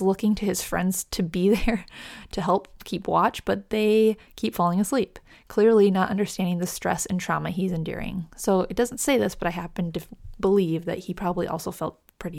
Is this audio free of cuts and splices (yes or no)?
yes